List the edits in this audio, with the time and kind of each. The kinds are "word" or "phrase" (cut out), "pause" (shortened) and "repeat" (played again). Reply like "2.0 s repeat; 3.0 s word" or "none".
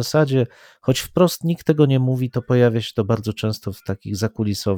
none